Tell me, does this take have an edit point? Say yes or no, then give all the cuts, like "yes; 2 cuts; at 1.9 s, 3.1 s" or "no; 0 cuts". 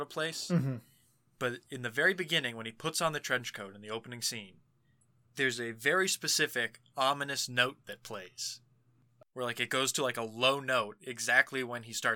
no; 0 cuts